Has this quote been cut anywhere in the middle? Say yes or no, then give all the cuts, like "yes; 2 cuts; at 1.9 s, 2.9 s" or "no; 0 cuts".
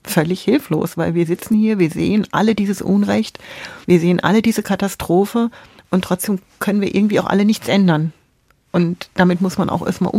no; 0 cuts